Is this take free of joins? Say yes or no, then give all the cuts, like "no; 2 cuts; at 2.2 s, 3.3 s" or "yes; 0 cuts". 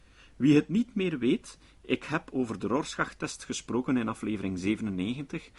yes; 0 cuts